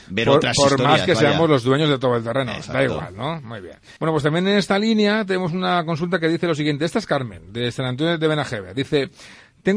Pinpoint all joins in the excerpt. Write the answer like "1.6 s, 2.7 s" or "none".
4.0 s